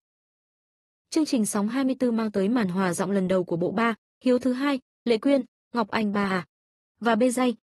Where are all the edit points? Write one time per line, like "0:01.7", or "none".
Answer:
none